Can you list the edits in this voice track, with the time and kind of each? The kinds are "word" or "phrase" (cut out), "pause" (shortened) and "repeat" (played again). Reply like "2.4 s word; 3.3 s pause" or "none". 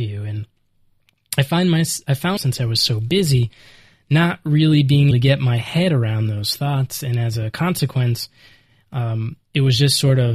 2.4 s word; 5.1 s word